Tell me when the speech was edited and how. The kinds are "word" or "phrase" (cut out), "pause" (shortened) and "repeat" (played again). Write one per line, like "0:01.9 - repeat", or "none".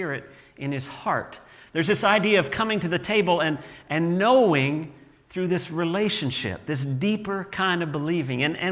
none